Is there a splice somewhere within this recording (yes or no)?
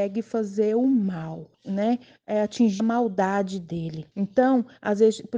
yes